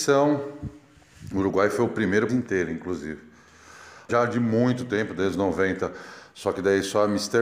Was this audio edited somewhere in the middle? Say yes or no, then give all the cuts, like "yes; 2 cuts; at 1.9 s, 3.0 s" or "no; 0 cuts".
yes; 3 cuts; at 2.3 s, 4.1 s, 5.3 s